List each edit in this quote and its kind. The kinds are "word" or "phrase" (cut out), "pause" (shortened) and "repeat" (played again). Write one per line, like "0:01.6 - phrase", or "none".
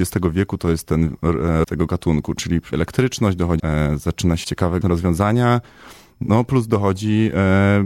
0:01.6 - word
0:02.7 - word
0:03.6 - word
0:04.4 - word
0:04.8 - word